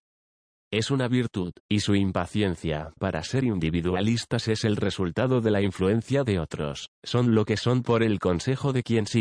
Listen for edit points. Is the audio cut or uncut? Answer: cut